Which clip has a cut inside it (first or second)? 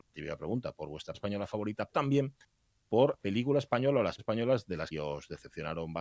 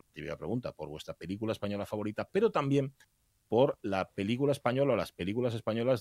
first